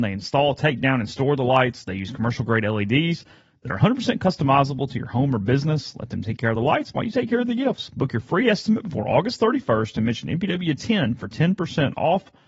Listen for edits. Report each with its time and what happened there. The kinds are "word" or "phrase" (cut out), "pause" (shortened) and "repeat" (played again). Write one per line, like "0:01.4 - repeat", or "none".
none